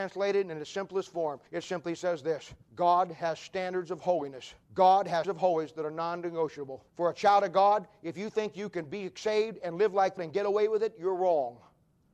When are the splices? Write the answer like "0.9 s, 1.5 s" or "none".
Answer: 1.5 s, 2.6 s, 4.6 s, 5.2 s, 6.9 s, 10.2 s